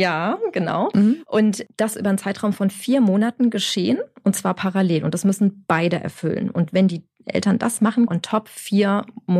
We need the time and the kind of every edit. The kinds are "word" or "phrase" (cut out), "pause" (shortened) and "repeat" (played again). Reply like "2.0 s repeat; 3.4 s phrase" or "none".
1.9 s word; 8.1 s phrase